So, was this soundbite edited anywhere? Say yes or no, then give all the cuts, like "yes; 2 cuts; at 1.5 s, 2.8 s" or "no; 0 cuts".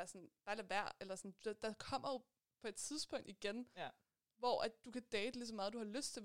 no; 0 cuts